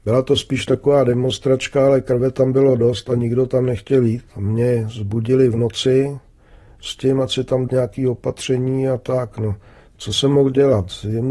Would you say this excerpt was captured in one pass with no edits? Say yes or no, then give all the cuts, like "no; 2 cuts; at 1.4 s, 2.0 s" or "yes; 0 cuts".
no; 1 cut; at 7.7 s